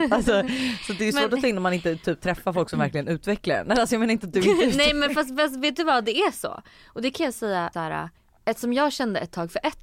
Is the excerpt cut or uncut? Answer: cut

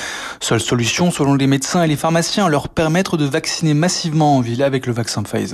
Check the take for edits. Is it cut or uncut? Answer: uncut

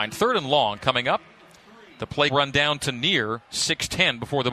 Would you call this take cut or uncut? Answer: cut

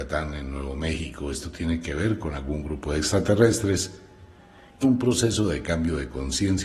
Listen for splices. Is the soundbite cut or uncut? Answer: cut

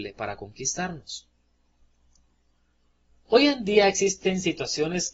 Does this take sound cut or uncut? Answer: uncut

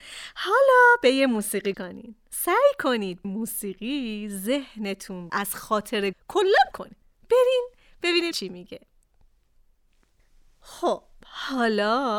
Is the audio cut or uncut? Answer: cut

